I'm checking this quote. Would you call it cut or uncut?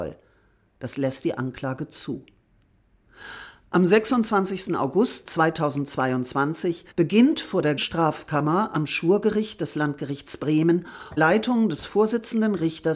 cut